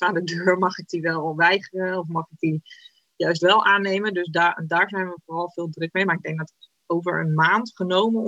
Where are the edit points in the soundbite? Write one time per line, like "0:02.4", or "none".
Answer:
none